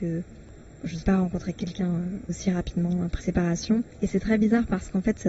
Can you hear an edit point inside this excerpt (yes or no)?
yes